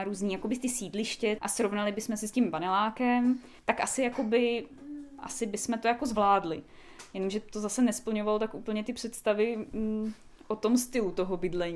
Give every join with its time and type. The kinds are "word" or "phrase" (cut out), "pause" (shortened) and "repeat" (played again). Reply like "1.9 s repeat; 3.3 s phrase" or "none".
1.4 s word; 3.6 s pause